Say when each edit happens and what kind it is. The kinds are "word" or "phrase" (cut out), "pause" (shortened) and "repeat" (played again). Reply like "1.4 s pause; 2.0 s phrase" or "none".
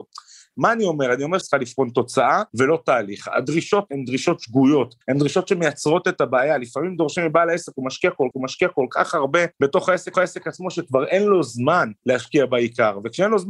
1.4 s word; 2.5 s pause; 3.9 s word; 5.0 s pause; 8.3 s repeat; 9.5 s pause; 10.1 s repeat; 12.0 s pause